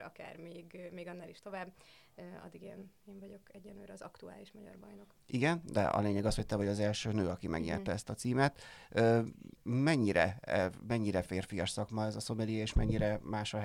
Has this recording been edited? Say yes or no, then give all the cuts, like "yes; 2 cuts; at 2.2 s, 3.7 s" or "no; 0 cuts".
no; 0 cuts